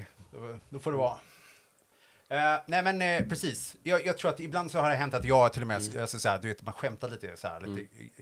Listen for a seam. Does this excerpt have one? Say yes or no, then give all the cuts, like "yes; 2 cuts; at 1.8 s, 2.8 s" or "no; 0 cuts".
no; 0 cuts